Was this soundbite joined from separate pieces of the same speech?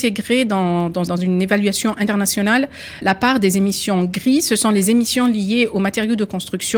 yes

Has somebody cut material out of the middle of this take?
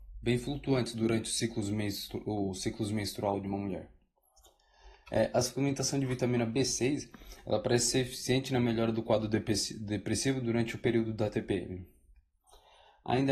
no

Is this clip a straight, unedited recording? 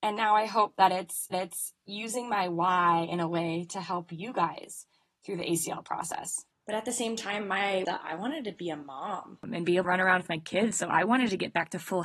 no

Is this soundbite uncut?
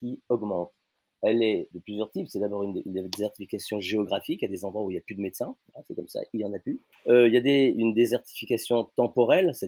no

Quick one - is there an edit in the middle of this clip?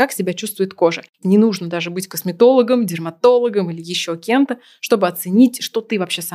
yes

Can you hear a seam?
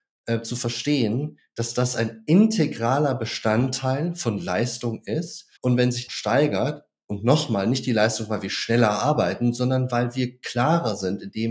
yes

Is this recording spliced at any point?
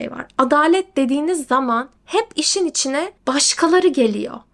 yes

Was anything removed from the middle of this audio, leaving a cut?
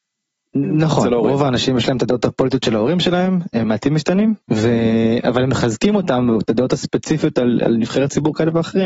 yes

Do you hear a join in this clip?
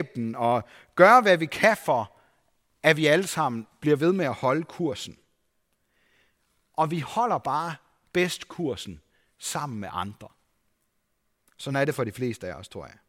no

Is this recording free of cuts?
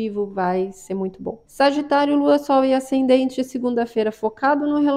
no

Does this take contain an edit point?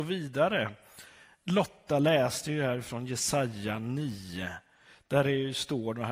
no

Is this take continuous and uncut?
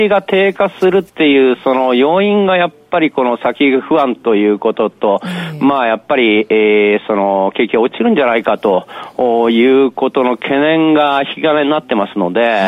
no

